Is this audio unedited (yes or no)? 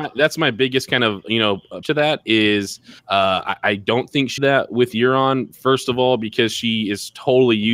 no